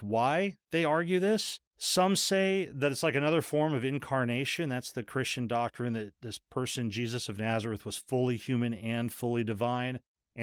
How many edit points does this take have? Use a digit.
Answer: 1